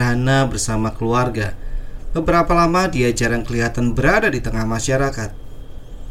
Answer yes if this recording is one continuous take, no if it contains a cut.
yes